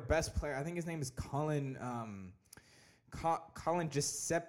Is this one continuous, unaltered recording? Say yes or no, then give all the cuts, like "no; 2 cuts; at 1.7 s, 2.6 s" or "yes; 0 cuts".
yes; 0 cuts